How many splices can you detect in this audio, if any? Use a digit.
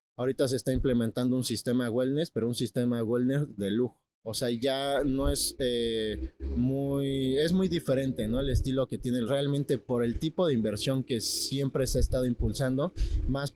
2